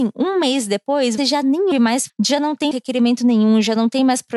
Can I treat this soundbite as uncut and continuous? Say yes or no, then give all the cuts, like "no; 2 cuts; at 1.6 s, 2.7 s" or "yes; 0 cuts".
no; 4 cuts; at 1.2 s, 1.7 s, 2.1 s, 2.7 s